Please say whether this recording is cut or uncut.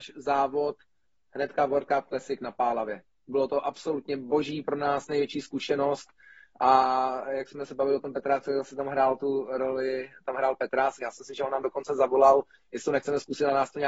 uncut